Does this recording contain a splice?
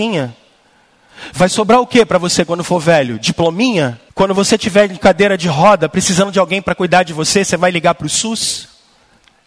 yes; 1 cut; at 4.1 s

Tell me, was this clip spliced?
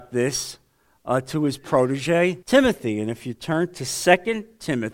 yes; 1 cut; at 2.4 s

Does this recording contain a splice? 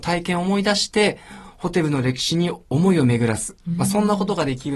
yes; 1 cut; at 2.6 s

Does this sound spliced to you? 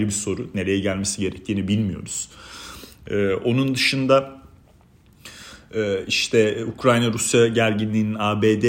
no; 0 cuts

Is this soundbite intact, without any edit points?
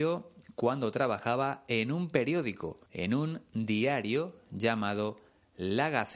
no; 1 cut; at 2.9 s

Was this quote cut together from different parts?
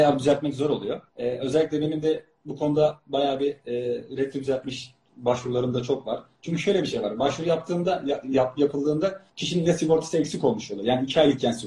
yes; 2 cuts; at 1.1 s, 9.3 s

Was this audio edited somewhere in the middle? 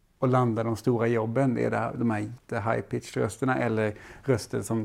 yes; 1 cut; at 2.4 s

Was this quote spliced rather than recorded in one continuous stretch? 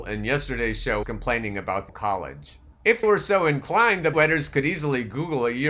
yes; 4 cuts; at 1.0 s, 1.9 s, 3.0 s, 4.1 s

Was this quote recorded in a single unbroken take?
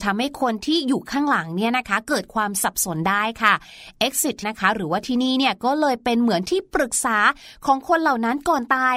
no; 1 cut; at 4.4 s

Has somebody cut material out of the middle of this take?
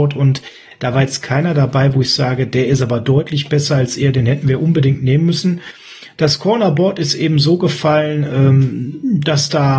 no; 0 cuts

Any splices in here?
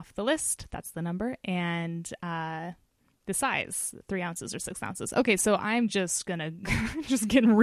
no; 0 cuts

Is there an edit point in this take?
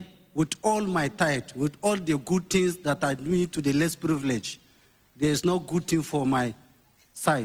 no; 0 cuts

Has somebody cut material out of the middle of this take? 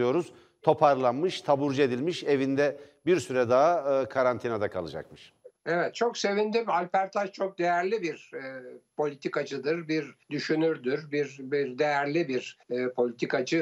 yes; 3 cuts; at 5.6 s, 10.2 s, 12.6 s

